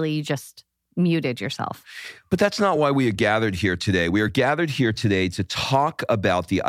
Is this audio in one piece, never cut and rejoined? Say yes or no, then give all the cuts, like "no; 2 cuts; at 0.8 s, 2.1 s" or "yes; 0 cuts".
yes; 0 cuts